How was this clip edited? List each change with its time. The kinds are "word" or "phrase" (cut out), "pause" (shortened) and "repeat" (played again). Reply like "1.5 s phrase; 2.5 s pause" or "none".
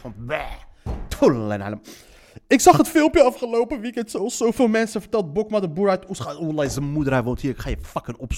none